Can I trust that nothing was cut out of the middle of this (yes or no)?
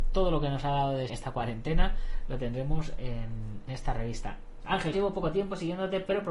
no